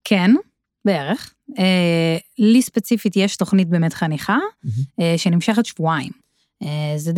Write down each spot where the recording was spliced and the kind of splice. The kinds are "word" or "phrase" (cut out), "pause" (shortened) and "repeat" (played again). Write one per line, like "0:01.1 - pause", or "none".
none